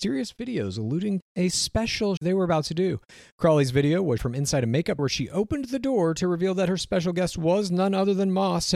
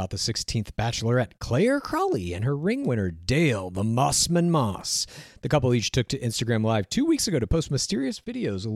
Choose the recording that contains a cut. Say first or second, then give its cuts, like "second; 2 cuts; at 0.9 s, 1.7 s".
first; 4 cuts; at 1.2 s, 2.2 s, 4.2 s, 5.0 s